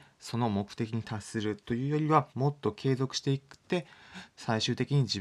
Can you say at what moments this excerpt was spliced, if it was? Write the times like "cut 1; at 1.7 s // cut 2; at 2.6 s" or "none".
cut 1; at 2.3 s